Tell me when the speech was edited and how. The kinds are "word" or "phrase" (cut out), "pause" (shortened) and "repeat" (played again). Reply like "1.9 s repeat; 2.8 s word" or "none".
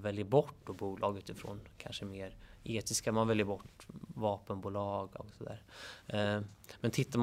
5.2 s word

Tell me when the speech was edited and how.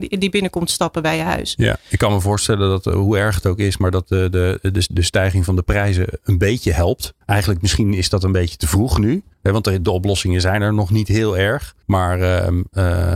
7.2 s pause; 9.3 s pause; 11.8 s pause

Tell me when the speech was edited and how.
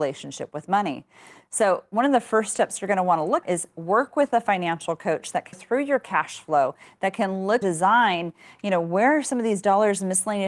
3.4 s word; 5.5 s word; 7.6 s word

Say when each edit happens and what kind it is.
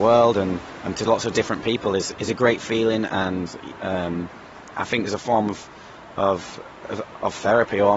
0.9 s phrase; 2.1 s word; 5.0 s phrase

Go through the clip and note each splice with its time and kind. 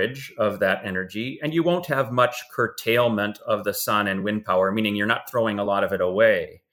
none

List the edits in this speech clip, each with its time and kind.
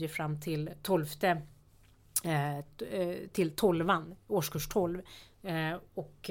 none

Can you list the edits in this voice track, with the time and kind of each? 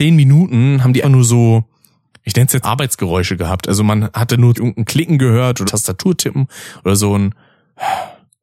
1.0 s word; 2.6 s word; 4.5 s word; 5.7 s word

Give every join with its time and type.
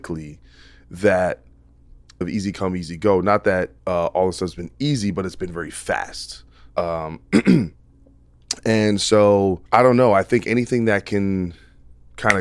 2.2 s phrase; 3.8 s pause; 6.7 s pause; 9.7 s pause

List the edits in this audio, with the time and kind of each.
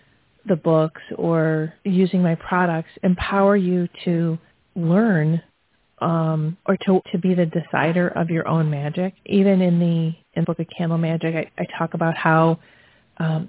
1.8 s pause; 4.5 s pause; 6.6 s pause; 7.0 s phrase; 9.2 s pause; 10.4 s phrase

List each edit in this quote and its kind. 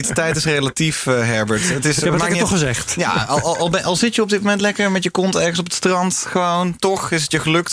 none

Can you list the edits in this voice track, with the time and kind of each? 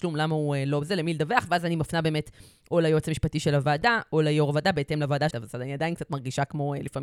5.3 s word

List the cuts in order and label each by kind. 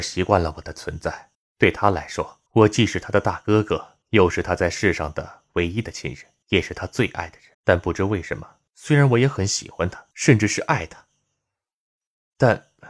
1.3 s pause; 2.5 s pause; 4.0 s pause; 6.4 s pause; 7.5 s pause; 8.7 s pause; 10.1 s pause

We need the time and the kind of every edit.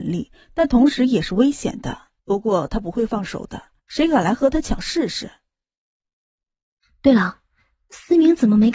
2.2 s pause; 3.8 s pause

